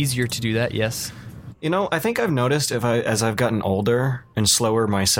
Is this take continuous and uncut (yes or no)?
yes